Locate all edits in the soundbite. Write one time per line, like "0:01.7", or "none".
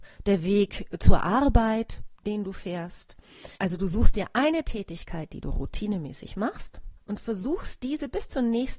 0:03.5
0:07.0